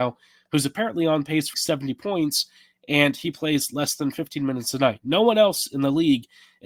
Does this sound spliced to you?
yes; 1 cut; at 1.5 s

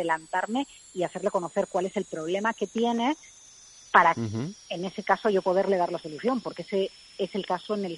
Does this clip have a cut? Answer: no; 0 cuts

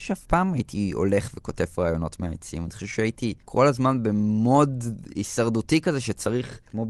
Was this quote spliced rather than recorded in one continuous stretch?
yes; 1 cut; at 3.4 s

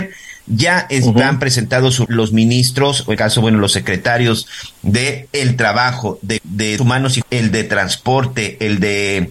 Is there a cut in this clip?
yes; 5 cuts; at 2.1 s, 3.2 s, 6.4 s, 6.8 s, 7.2 s

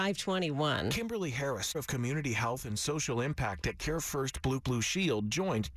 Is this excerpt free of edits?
no; 2 cuts; at 1.7 s, 4.6 s

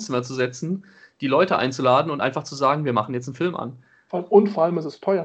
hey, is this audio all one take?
yes; 0 cuts

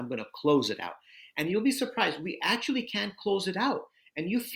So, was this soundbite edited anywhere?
no; 0 cuts

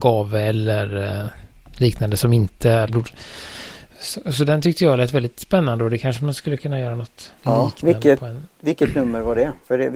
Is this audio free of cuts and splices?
no; 2 cuts; at 2.9 s, 7.4 s

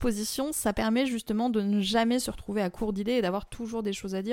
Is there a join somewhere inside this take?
no; 0 cuts

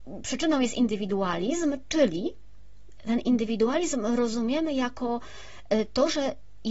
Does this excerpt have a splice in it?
no; 0 cuts

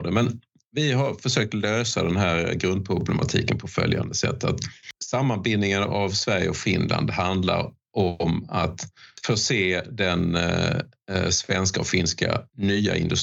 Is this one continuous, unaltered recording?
yes; 0 cuts

